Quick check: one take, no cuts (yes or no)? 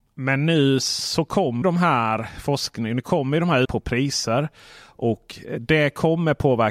no